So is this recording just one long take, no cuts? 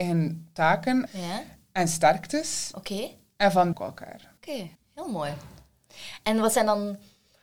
no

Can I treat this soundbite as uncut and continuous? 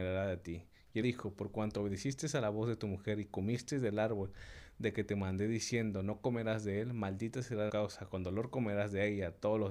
no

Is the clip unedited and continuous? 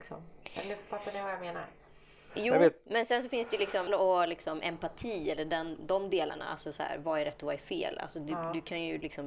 no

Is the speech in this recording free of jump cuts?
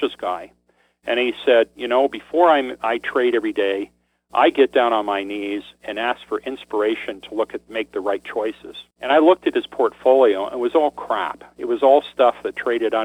no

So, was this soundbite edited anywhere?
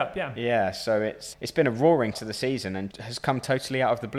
yes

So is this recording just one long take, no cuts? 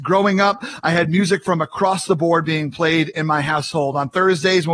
yes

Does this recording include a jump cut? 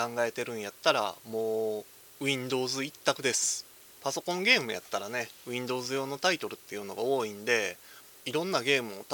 no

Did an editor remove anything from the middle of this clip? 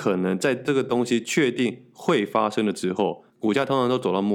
yes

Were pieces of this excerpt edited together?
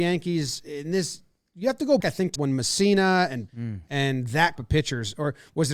yes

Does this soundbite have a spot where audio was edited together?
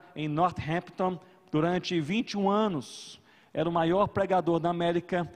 no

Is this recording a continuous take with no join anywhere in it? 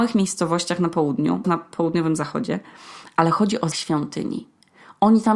no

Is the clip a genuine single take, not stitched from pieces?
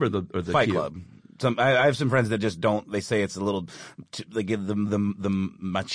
yes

